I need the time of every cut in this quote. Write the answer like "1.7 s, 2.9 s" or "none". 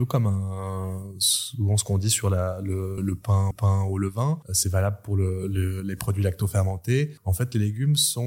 3.0 s, 3.5 s